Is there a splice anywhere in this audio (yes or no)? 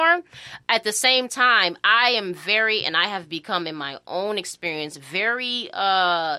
no